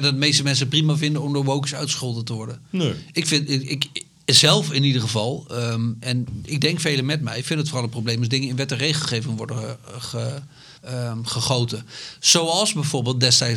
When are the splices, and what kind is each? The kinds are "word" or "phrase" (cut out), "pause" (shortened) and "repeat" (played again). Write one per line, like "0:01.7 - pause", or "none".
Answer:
0:10.8 - pause